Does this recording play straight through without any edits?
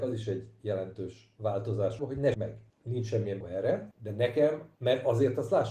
no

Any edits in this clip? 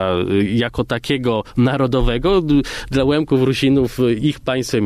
no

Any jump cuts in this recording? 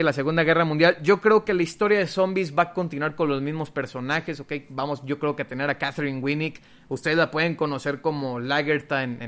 no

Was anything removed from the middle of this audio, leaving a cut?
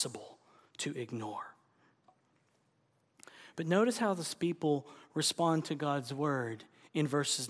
no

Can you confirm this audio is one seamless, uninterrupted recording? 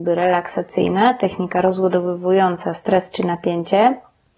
yes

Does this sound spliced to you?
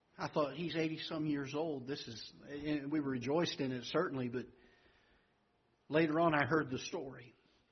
no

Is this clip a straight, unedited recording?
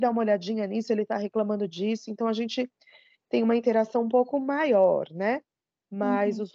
yes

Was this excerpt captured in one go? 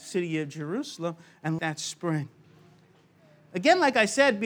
no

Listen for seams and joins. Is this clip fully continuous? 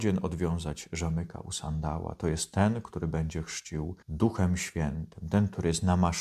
no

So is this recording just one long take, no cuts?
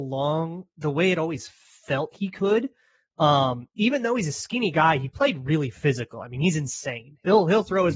yes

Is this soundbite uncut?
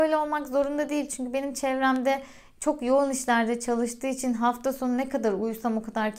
yes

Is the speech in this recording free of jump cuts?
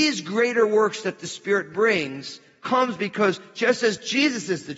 yes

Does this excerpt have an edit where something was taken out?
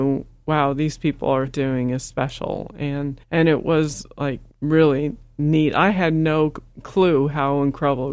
yes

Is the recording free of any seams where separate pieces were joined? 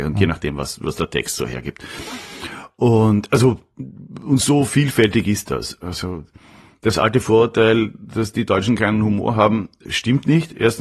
no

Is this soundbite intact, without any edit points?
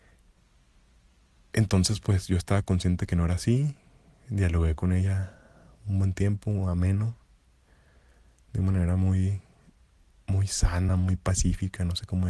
yes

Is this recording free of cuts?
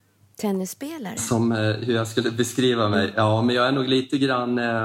yes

